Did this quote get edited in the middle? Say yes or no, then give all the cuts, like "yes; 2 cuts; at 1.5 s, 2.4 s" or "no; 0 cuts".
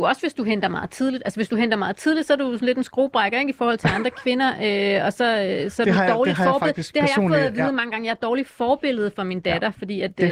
no; 0 cuts